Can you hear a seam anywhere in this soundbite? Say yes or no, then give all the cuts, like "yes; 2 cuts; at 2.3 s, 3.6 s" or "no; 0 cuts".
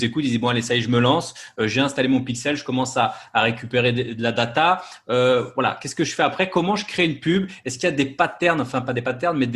no; 0 cuts